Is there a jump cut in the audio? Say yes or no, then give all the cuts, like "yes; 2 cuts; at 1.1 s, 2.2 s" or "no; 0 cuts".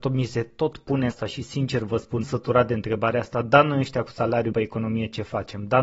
yes; 3 cuts; at 1.1 s, 2.2 s, 4.5 s